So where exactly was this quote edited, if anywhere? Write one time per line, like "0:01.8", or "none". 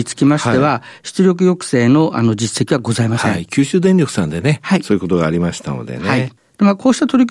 none

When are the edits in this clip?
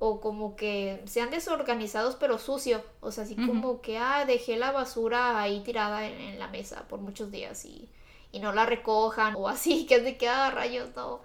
0:09.3

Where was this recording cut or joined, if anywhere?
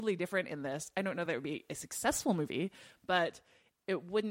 none

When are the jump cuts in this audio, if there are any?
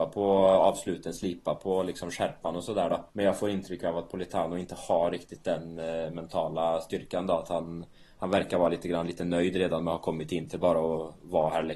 0:03.1

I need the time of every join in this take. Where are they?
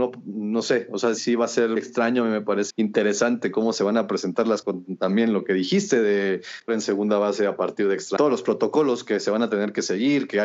0:01.2
0:01.8
0:02.7
0:04.6
0:06.7
0:08.2

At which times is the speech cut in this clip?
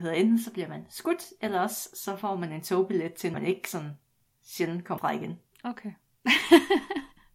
0:03.3
0:05.0

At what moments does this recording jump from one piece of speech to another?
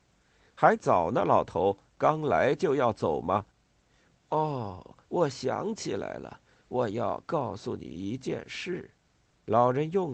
0:03.5
0:05.0

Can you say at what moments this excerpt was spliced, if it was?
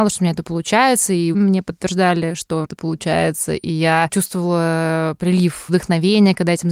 0:01.3
0:02.6
0:04.1
0:05.7

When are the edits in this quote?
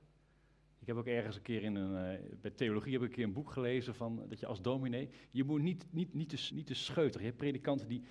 0:06.5

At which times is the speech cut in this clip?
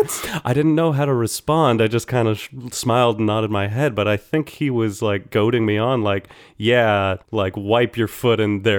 0:07.2

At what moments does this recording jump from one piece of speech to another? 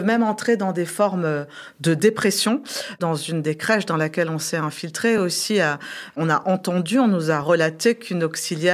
none

